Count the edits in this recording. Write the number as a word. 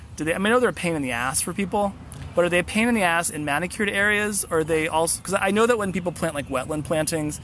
zero